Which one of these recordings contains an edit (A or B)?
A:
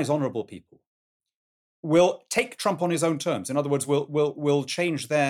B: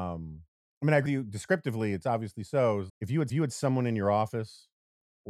B